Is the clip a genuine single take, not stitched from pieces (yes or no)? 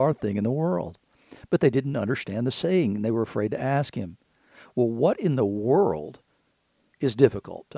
yes